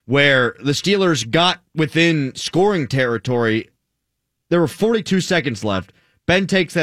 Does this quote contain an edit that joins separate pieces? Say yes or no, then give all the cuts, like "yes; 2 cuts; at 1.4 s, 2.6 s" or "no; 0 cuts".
no; 0 cuts